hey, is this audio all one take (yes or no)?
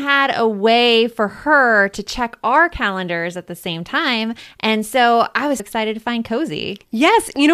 no